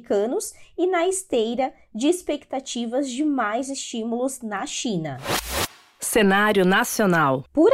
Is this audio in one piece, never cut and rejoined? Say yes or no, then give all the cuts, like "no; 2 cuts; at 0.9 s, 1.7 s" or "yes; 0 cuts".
yes; 0 cuts